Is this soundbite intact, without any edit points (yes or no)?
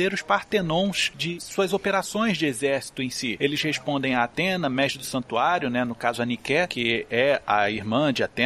yes